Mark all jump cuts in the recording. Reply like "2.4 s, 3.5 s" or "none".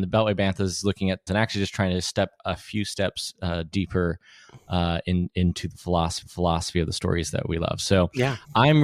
1.3 s, 6.2 s